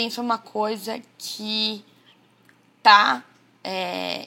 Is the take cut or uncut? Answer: uncut